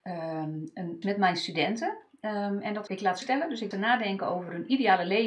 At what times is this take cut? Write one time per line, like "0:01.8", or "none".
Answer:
0:01.0
0:02.9
0:03.2
0:03.7